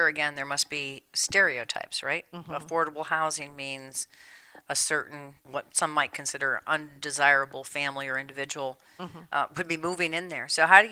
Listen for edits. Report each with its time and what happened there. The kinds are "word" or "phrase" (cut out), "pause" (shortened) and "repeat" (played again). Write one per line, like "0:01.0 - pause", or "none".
0:05.4 - pause